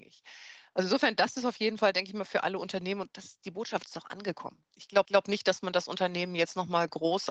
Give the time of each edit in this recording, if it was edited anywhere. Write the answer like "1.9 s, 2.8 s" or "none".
5.0 s